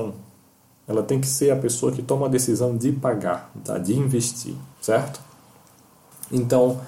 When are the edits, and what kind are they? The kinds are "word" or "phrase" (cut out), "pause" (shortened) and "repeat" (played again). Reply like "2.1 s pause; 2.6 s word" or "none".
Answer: 4.7 s pause